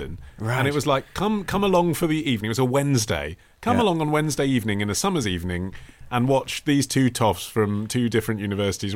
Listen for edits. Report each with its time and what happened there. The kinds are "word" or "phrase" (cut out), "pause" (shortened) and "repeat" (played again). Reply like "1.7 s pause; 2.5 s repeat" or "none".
none